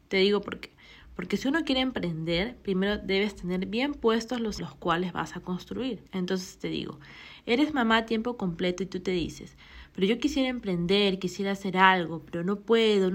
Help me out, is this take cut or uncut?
cut